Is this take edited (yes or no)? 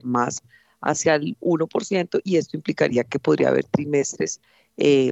no